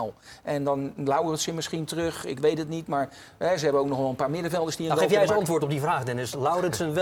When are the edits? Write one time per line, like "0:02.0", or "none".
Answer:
none